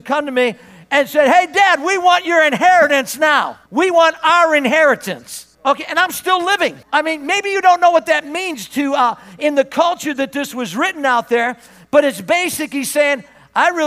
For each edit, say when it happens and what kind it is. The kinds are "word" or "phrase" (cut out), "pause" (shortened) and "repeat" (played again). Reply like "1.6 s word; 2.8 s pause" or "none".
3.7 s pause; 5.5 s pause; 6.8 s pause